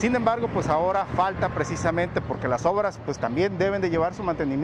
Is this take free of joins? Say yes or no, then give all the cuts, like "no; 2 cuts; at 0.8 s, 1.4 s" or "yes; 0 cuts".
yes; 0 cuts